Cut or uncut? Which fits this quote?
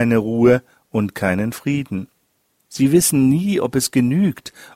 uncut